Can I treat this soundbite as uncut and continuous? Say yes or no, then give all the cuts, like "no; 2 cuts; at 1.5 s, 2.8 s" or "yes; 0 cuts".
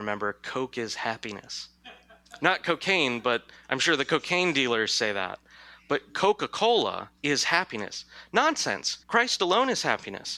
no; 3 cuts; at 1.8 s, 7.2 s, 9.0 s